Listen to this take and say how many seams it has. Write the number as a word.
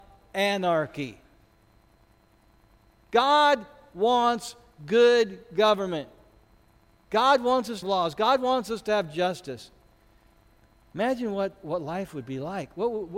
one